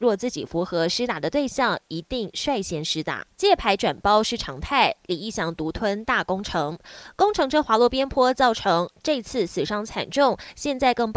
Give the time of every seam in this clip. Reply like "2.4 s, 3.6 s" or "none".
3.3 s